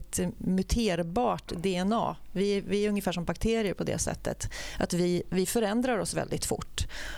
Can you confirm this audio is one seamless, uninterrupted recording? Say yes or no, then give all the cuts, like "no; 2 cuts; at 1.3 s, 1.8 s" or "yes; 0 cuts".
yes; 0 cuts